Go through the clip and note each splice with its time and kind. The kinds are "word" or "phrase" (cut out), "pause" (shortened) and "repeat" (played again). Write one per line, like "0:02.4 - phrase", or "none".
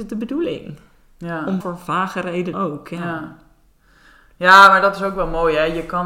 0:01.6 - word
0:02.5 - word